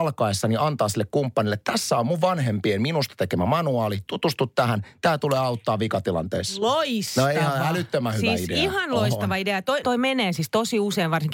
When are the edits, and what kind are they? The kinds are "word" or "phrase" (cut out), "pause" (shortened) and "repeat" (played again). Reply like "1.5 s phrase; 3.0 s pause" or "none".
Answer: 9.8 s word